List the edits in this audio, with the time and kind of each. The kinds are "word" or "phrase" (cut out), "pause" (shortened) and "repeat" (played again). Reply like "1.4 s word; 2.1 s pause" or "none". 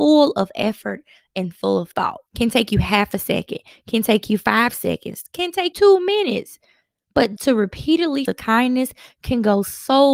2.3 s pause; 5.7 s word; 7.4 s word; 8.3 s phrase